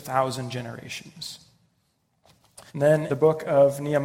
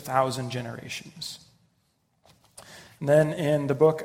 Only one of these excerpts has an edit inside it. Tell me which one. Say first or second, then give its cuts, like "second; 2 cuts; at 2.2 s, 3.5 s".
first; 2 cuts; at 2.7 s, 3.1 s